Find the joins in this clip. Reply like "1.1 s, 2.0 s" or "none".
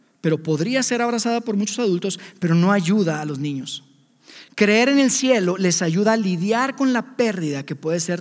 none